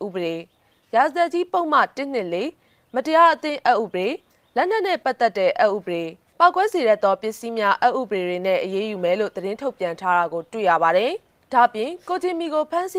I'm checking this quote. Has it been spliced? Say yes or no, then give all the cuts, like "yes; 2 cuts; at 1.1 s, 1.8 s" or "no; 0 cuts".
no; 0 cuts